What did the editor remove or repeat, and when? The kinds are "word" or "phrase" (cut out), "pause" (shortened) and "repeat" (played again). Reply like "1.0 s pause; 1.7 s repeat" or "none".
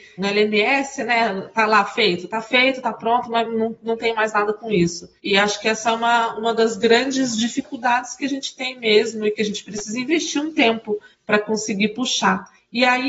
none

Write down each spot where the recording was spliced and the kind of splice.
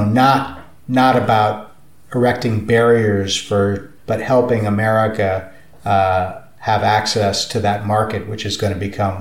4.0 s phrase

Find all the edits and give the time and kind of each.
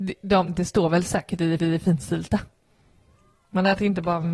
1.6 s repeat

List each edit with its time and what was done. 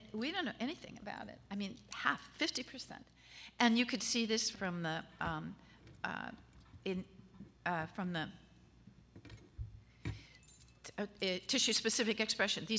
4.5 s phrase; 7.6 s pause

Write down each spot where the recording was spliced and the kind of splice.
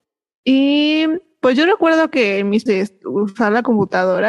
2.7 s phrase

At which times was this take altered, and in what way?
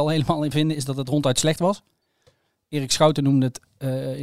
none

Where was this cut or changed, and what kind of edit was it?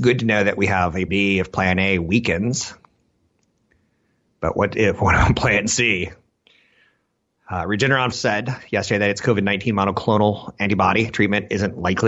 1.1 s word; 8.1 s word

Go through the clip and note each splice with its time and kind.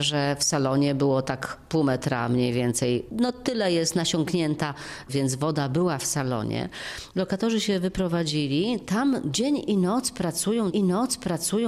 5.1 s word; 10.7 s repeat

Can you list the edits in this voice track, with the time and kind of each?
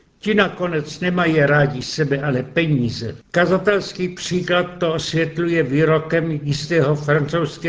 3.2 s pause

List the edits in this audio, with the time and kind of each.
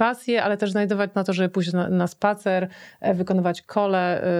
1.1 s word

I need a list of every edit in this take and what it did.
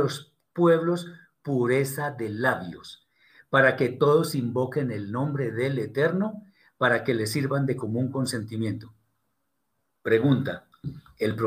none

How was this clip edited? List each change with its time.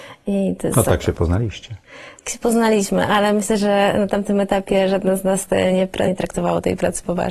6.1 s word

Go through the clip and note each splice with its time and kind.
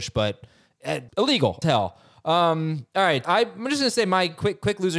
1.1 s word; 1.6 s word; 3.2 s word

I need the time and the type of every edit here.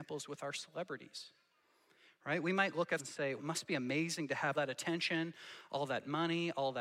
3.0 s word; 3.4 s word; 4.5 s word

